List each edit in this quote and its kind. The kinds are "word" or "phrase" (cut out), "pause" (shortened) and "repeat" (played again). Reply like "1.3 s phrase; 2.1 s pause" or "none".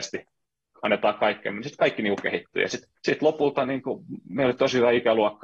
3.0 s pause